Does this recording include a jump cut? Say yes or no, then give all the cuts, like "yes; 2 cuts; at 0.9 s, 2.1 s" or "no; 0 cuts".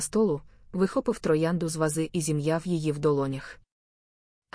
no; 0 cuts